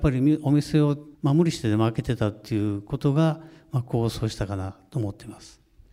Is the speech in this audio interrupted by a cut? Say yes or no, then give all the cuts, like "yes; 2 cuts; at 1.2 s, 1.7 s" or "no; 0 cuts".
yes; 1 cut; at 1.1 s